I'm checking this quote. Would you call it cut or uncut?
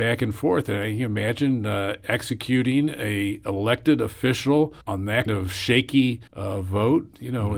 cut